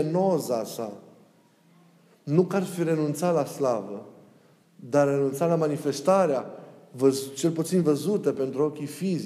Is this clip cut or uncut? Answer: uncut